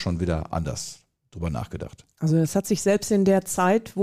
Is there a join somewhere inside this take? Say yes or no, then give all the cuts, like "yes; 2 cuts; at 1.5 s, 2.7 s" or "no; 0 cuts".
no; 0 cuts